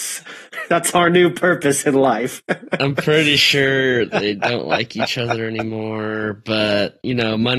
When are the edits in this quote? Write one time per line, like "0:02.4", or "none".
none